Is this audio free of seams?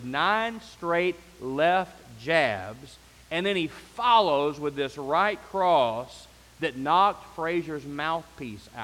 yes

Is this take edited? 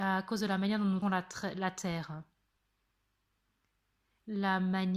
yes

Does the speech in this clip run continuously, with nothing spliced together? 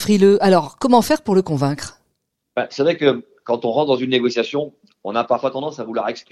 yes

